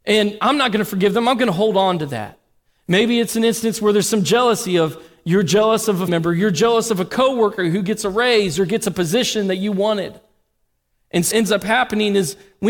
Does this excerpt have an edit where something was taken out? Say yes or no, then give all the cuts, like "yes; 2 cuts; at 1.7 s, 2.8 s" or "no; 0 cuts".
yes; 2 cuts; at 6.1 s, 11.3 s